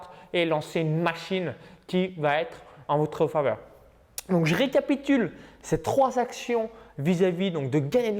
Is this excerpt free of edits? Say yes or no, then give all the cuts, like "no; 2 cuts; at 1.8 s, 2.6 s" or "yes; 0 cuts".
yes; 0 cuts